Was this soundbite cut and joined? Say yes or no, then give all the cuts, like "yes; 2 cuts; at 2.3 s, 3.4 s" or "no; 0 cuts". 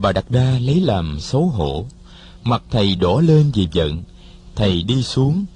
no; 0 cuts